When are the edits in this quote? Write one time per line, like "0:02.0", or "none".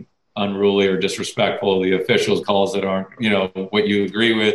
0:02.4
0:03.2